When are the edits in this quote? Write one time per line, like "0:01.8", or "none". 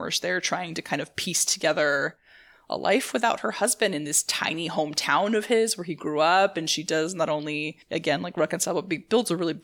0:07.8